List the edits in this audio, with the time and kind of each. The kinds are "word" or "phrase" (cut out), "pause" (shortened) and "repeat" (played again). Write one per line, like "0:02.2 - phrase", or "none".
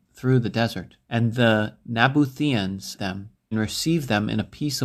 0:01.0 - pause
0:03.0 - word
0:03.5 - word

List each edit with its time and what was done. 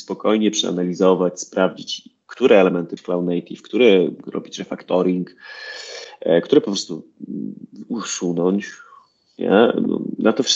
0:03.0 - word

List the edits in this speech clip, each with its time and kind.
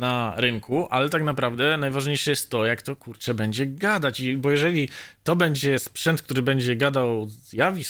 none

